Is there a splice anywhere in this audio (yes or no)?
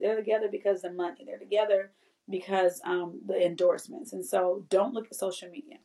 no